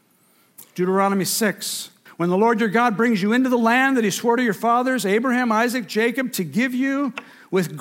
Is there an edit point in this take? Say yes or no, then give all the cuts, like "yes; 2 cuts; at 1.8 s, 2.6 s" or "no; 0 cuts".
yes; 1 cut; at 2.1 s